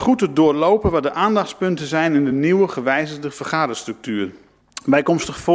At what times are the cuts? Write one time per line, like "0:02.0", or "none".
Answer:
none